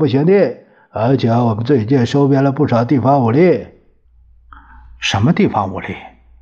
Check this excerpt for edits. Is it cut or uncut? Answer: uncut